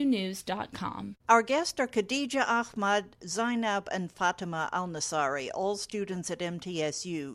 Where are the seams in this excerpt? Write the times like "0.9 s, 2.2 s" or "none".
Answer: 1.2 s